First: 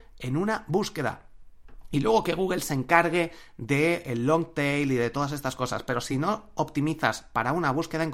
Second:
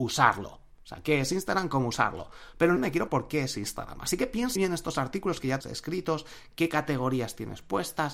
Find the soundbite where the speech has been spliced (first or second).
second